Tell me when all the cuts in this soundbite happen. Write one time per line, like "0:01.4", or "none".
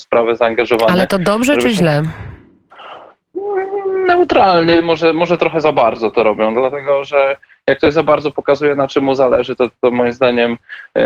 none